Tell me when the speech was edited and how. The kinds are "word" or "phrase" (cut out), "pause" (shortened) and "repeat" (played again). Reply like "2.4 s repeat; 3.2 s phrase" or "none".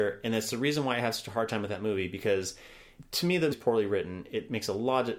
3.5 s word